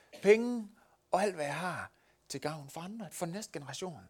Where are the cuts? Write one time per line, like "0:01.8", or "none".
0:03.1